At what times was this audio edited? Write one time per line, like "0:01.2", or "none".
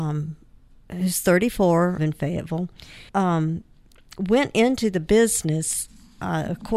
0:02.0
0:03.1